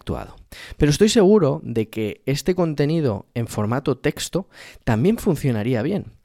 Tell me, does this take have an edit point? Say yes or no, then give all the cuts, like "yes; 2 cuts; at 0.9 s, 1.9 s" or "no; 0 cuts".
no; 0 cuts